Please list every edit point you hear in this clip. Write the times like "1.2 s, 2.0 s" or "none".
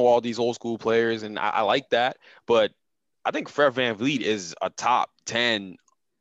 none